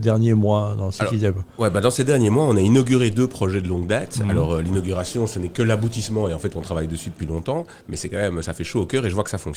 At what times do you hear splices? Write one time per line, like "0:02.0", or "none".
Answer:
none